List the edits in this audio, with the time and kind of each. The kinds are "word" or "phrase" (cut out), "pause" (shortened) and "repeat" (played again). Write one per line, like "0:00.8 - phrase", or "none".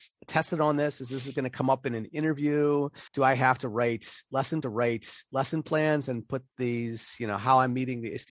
0:03.1 - pause
0:04.6 - repeat